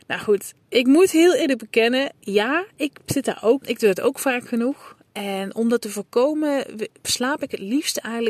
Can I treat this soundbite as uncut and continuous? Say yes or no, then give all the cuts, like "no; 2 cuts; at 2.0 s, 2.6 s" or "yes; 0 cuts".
no; 2 cuts; at 3.6 s, 5.1 s